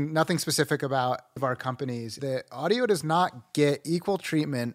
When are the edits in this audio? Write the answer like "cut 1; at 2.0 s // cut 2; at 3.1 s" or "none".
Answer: cut 1; at 1.4 s // cut 2; at 2.2 s